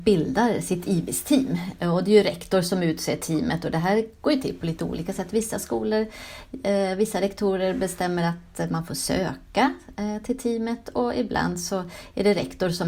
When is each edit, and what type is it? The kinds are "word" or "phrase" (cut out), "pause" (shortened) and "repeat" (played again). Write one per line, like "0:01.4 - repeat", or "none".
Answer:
none